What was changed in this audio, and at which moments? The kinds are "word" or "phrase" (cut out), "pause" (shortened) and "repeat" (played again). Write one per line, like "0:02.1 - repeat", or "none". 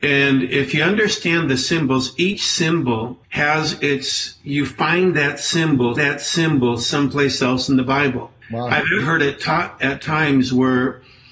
0:03.2 - pause
0:06.0 - repeat
0:08.4 - pause
0:09.0 - word

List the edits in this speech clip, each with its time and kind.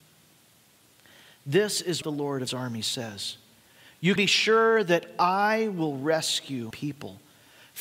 0:02.0 - word
0:02.5 - word
0:04.2 - word
0:06.7 - word

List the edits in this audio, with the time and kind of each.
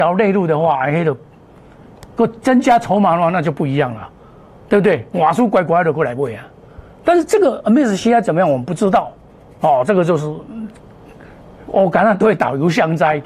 none

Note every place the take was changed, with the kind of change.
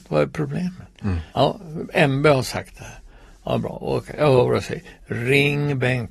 0:01.3 - pause

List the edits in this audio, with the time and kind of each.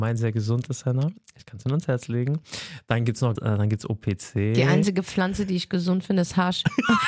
0:03.4 - word

